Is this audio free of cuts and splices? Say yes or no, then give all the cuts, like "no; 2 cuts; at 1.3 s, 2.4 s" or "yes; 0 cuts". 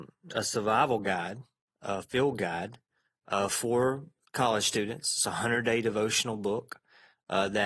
yes; 0 cuts